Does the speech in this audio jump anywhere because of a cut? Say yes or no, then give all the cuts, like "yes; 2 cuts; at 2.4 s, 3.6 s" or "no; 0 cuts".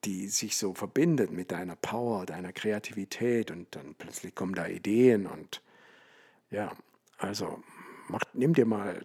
no; 0 cuts